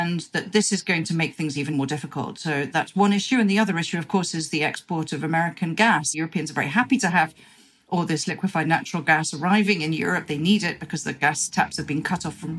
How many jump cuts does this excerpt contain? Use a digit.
0